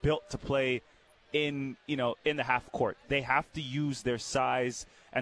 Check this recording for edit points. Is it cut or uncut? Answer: uncut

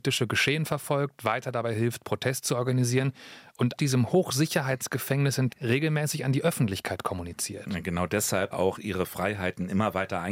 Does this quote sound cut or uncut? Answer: cut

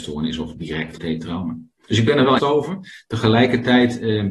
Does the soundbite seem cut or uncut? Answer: cut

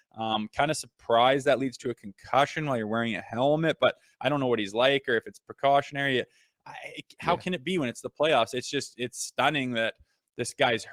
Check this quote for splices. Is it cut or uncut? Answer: uncut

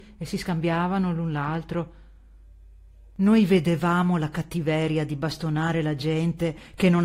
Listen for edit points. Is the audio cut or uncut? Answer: uncut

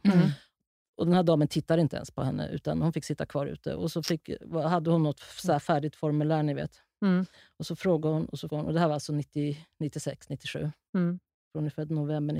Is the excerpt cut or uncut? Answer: cut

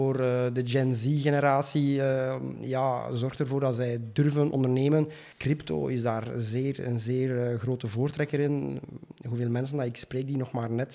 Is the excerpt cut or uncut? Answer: cut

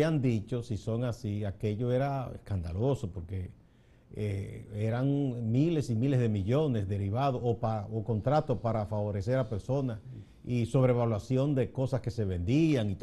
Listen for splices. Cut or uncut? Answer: uncut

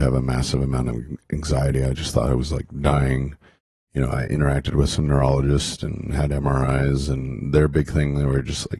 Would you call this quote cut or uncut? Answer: uncut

